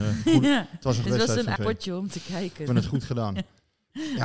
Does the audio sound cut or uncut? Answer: cut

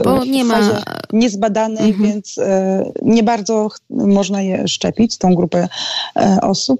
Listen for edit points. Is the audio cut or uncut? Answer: cut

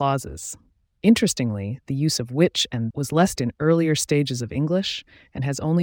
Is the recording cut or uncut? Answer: cut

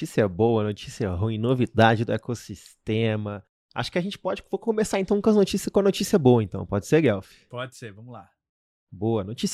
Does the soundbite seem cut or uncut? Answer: uncut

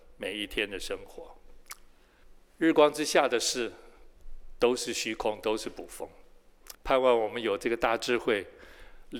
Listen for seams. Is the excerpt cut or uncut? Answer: cut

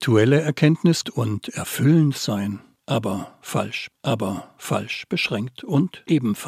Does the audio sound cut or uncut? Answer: cut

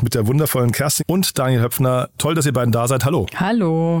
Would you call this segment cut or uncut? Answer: cut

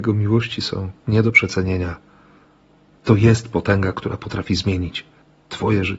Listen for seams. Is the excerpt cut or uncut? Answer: uncut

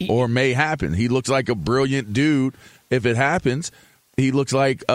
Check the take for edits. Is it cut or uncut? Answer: uncut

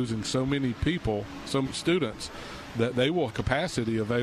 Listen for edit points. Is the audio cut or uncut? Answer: cut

